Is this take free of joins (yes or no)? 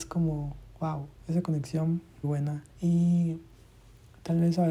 no